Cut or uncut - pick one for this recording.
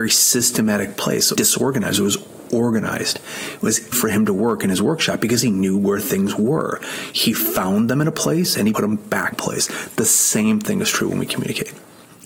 cut